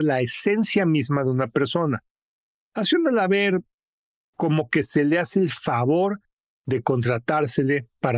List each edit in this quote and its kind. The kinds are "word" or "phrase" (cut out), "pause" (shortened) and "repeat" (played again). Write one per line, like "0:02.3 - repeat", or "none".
none